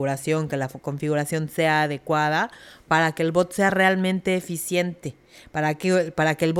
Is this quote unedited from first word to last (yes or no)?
yes